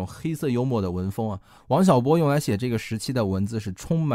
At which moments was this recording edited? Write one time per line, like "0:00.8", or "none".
0:01.6